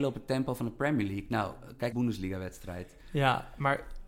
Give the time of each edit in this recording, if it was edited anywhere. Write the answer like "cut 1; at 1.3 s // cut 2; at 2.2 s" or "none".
cut 1; at 1.9 s